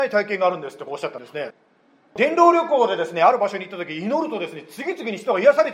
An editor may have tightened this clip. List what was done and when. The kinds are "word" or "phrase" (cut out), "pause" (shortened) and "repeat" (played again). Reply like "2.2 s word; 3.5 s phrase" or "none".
none